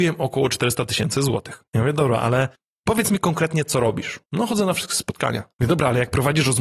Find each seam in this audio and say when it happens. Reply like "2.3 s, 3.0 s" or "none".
1.7 s, 2.6 s, 4.2 s, 5.5 s